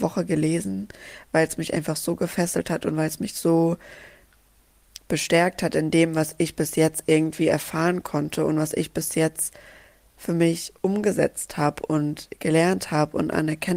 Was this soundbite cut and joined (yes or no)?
no